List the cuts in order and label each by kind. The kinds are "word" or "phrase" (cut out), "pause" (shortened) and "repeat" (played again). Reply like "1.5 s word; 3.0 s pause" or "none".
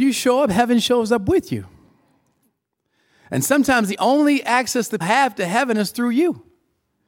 5.0 s word